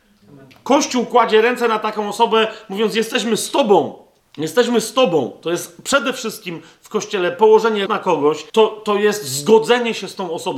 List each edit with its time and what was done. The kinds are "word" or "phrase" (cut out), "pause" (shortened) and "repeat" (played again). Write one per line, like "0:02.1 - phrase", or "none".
0:04.2 - pause
0:07.9 - word
0:08.5 - pause

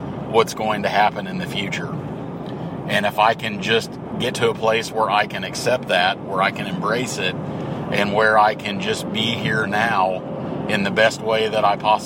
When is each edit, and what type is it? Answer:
none

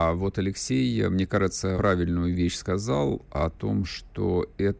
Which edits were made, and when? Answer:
0:01.7 - word

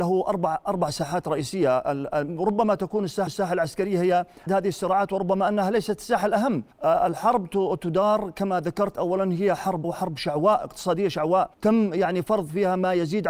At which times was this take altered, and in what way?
0:03.3 - repeat
0:04.5 - word
0:06.7 - pause
0:09.8 - word
0:11.5 - pause

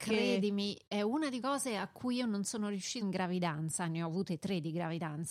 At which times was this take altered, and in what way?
0:01.4 - word
0:03.0 - phrase

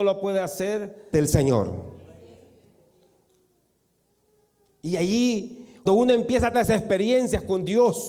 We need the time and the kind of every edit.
0:01.1 - word
0:05.9 - word
0:06.5 - word

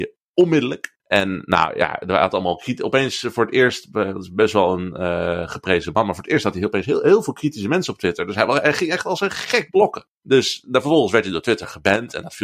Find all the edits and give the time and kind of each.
0:01.0 - pause
0:10.1 - pause

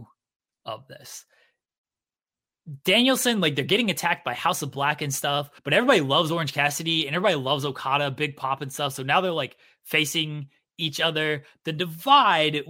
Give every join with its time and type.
0:05.6 - pause

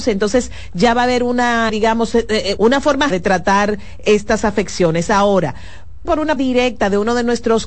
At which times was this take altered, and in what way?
0:01.7 - word
0:02.6 - word
0:03.1 - word
0:06.0 - word
0:06.4 - word

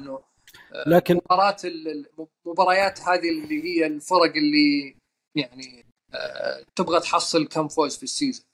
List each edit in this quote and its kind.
0:06.7 - pause

